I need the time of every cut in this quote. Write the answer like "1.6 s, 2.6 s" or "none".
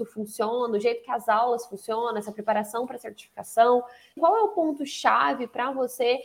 4.2 s